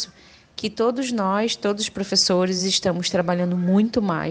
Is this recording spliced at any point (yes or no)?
no